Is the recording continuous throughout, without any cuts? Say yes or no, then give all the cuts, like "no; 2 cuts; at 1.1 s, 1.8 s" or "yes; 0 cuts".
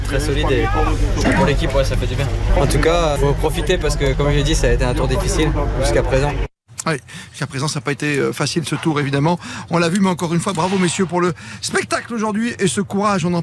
no; 1 cut; at 3.2 s